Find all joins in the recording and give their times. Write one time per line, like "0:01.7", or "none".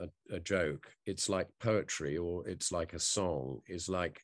none

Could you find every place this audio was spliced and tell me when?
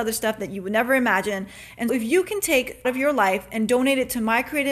0:01.9
0:02.8

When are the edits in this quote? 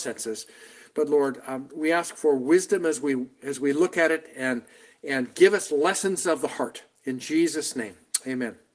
none

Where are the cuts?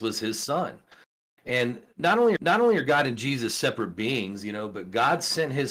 0:02.4

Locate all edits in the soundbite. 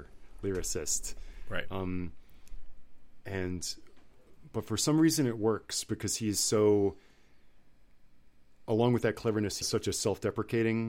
0:09.6

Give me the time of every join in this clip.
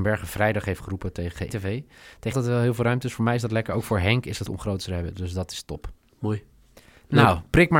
0:01.5
0:02.3
0:04.5

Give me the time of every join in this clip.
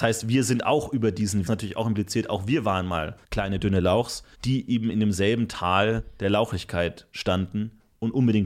0:01.5
0:03.2
0:04.3

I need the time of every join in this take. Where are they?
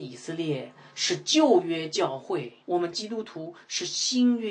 0:02.6

